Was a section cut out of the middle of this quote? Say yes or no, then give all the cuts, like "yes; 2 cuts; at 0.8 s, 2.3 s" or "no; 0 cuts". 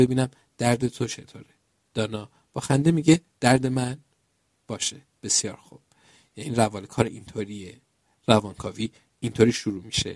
yes; 1 cut; at 1.8 s